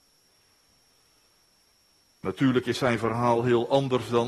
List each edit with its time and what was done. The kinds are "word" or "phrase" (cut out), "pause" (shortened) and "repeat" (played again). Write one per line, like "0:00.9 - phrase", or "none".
none